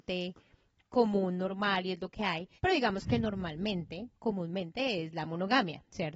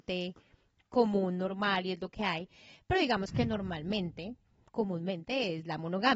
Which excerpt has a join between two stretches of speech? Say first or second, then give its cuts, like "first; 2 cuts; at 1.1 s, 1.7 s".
first; 2 cuts; at 2.6 s, 4.2 s